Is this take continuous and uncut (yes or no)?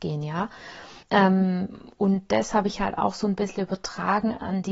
no